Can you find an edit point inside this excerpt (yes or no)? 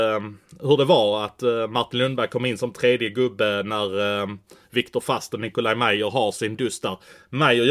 no